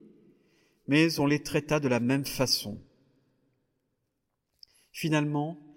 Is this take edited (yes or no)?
no